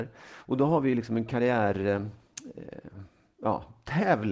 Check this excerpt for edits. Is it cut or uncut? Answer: uncut